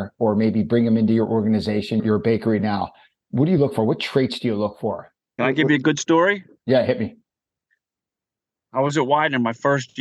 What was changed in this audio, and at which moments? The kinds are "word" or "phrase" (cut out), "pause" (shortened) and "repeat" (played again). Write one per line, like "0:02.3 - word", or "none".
none

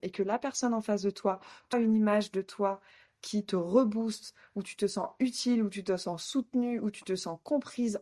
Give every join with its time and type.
0:01.7 - word

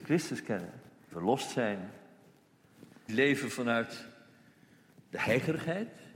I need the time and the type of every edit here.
0:01.1 - word
0:03.1 - word

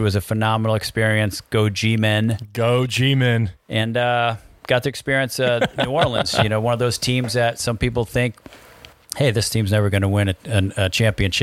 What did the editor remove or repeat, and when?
none

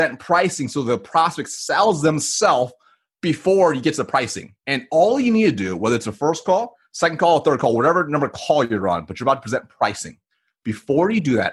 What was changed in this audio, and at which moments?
0:04.6 - pause

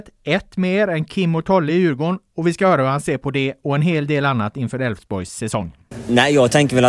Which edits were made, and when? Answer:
none

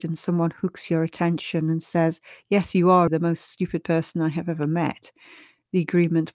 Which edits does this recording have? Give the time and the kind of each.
0:03.1 - word

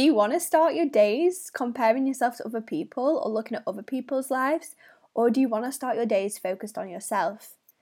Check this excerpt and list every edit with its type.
none

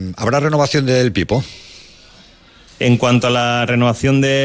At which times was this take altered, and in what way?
none

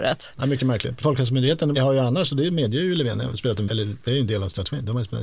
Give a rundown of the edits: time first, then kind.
0:03.7 - word

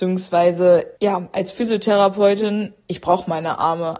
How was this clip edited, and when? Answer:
0:01.0 - pause

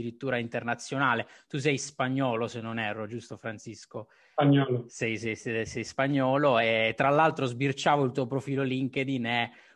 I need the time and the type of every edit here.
none

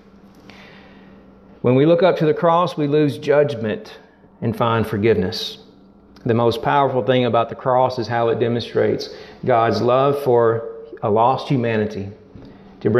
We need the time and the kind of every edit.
none

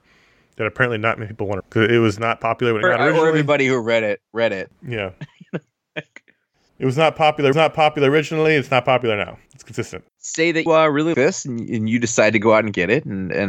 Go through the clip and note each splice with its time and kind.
0:01.6 - phrase
0:02.8 - phrase
0:04.3 - pause
0:07.5 - repeat
0:09.5 - pause
0:10.1 - pause
0:10.7 - word
0:11.1 - word

